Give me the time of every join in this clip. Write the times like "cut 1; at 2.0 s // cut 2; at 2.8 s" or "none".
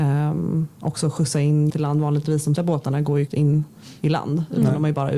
cut 1; at 1.7 s // cut 2; at 2.6 s // cut 3; at 3.3 s